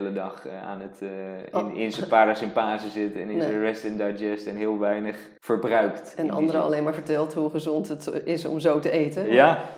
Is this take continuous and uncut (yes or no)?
no